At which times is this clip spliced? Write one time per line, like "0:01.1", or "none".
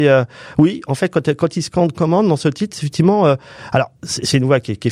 0:01.9